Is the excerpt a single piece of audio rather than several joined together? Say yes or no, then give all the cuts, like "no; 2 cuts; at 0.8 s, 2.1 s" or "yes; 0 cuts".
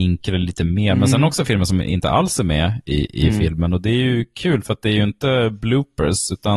yes; 0 cuts